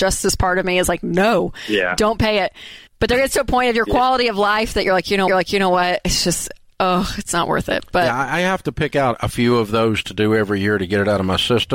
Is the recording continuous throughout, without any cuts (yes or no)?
no